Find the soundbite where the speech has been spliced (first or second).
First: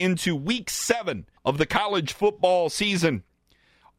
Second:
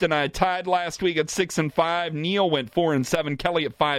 first